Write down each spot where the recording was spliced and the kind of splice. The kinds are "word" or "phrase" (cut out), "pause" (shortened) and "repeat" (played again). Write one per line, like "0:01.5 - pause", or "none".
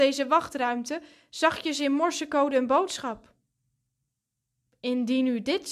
none